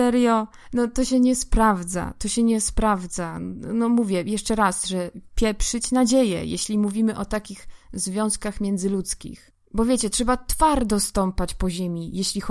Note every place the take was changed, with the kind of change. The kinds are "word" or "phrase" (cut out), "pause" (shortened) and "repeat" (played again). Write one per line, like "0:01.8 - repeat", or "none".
none